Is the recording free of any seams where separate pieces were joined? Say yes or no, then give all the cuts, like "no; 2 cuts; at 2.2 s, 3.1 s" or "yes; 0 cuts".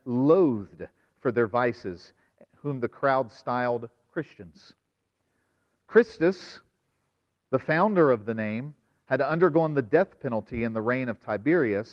yes; 0 cuts